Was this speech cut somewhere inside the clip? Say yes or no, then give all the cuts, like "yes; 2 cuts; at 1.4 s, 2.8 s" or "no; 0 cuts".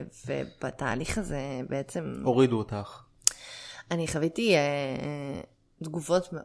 no; 0 cuts